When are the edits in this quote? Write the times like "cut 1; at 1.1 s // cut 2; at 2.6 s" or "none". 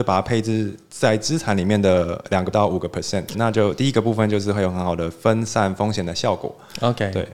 cut 1; at 2.5 s // cut 2; at 3.3 s

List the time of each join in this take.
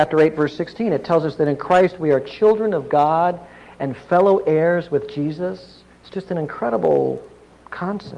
none

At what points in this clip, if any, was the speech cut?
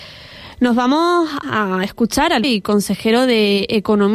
cut 1; at 1.4 s // cut 2; at 2.4 s

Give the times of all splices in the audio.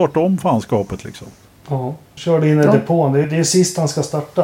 cut 1; at 2.2 s // cut 2; at 3.2 s

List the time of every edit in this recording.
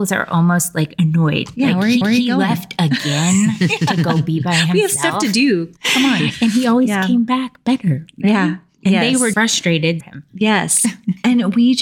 cut 1; at 2.0 s // cut 2; at 5.8 s // cut 3; at 9.3 s // cut 4; at 10.0 s

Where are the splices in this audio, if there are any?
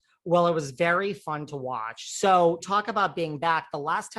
cut 1; at 2.6 s

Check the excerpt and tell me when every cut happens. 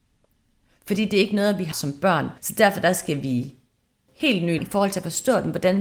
cut 1; at 1.7 s // cut 2; at 2.4 s // cut 3; at 4.1 s // cut 4; at 4.6 s

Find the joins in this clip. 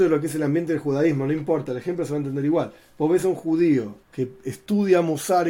cut 1; at 4.0 s

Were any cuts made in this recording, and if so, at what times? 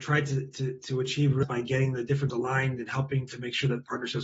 cut 1; at 1.4 s // cut 2; at 2.3 s

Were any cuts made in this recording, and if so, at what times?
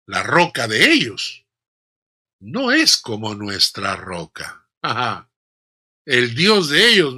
none

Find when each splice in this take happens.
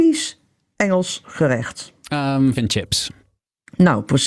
cut 1; at 2.5 s

